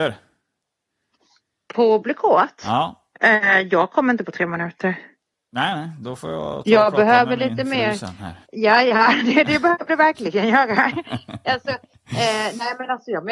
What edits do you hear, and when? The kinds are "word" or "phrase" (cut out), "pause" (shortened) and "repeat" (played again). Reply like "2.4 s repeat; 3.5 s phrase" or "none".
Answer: 3.2 s pause; 8.4 s pause